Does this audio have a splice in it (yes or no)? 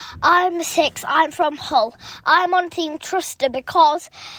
no